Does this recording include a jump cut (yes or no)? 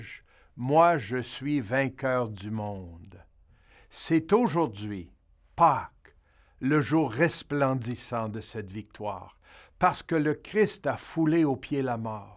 no